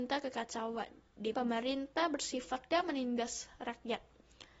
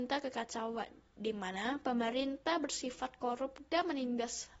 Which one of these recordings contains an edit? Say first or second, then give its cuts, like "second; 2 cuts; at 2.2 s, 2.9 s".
first; 2 cuts; at 1.3 s, 2.7 s